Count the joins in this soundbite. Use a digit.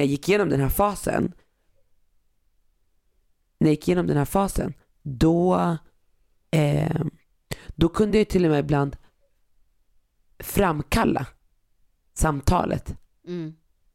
0